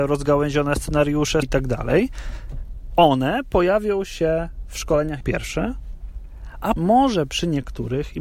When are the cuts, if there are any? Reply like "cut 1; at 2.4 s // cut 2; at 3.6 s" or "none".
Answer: cut 1; at 1.4 s // cut 2; at 5.2 s // cut 3; at 6.8 s